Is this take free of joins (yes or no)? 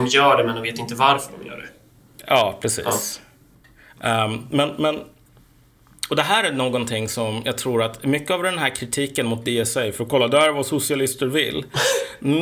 yes